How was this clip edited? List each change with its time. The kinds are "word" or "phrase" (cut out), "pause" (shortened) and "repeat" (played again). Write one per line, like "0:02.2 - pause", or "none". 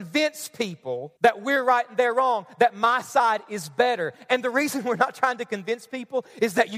0:01.2 - pause